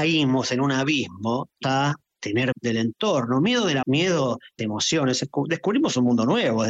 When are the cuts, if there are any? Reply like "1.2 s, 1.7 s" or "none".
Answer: 1.6 s, 2.5 s, 3.8 s, 4.6 s